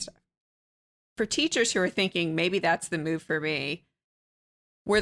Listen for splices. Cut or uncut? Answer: uncut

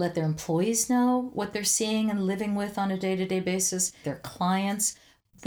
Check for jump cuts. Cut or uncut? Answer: cut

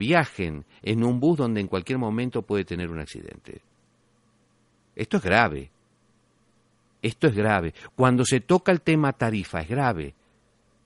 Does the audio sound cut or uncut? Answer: uncut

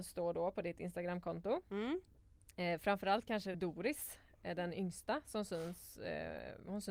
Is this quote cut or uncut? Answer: cut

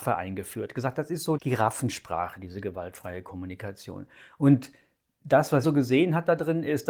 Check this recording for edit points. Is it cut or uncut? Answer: cut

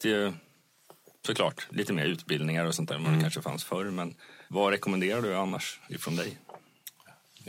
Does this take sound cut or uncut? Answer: cut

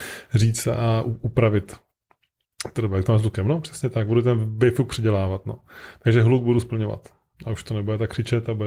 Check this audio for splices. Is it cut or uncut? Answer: uncut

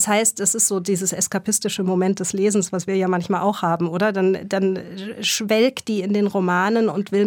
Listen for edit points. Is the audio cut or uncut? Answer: uncut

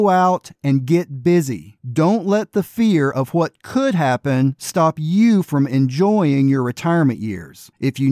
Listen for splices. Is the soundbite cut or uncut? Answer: uncut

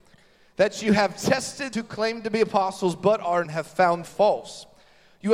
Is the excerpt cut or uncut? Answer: cut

